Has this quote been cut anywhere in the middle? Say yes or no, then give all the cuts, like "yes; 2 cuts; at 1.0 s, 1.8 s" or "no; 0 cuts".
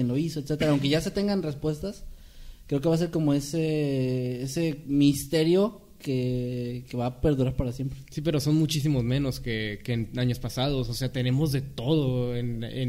no; 0 cuts